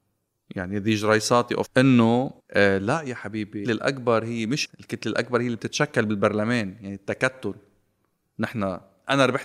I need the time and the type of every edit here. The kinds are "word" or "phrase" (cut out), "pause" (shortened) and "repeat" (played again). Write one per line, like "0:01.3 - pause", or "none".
0:01.7 - phrase
0:02.4 - pause
0:03.6 - word
0:04.6 - phrase